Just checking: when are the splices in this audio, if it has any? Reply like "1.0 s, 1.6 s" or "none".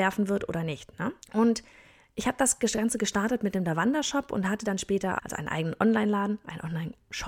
1.2 s, 5.2 s